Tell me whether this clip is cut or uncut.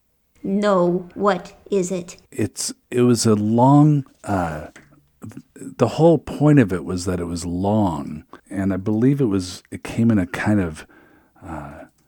cut